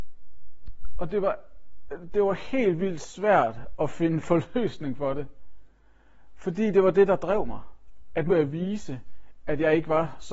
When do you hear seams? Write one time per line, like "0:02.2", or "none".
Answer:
0:08.3